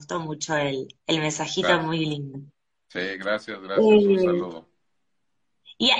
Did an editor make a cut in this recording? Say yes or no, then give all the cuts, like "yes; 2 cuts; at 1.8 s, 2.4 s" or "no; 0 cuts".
yes; 1 cut; at 1.0 s